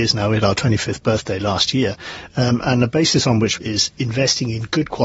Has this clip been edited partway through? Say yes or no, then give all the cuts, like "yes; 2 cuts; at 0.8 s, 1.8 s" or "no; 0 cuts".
yes; 1 cut; at 3.6 s